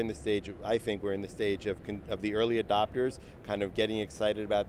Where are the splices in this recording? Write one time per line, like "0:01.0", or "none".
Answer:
none